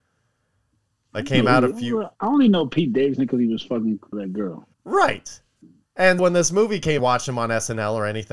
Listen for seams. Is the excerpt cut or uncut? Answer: cut